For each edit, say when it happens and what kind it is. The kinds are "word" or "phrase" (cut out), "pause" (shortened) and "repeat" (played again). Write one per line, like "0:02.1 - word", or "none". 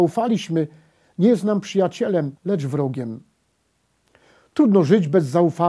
0:02.4 - pause